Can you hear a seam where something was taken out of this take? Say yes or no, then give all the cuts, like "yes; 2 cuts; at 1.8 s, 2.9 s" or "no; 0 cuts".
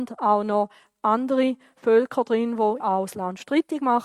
yes; 1 cut; at 2.8 s